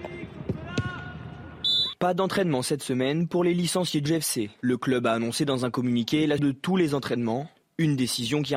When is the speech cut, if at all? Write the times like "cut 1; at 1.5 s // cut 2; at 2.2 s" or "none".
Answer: cut 1; at 4.1 s // cut 2; at 6.4 s